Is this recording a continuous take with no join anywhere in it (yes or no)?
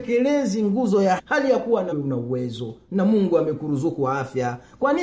no